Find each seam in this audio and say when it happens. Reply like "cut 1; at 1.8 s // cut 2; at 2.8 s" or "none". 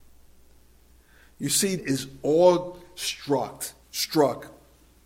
cut 1; at 1.8 s // cut 2; at 3.8 s